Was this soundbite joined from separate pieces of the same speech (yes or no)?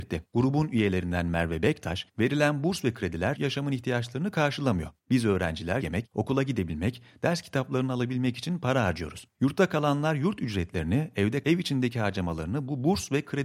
yes